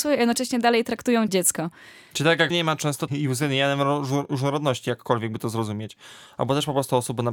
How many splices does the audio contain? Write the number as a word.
three